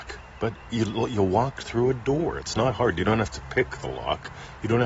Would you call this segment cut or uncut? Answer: uncut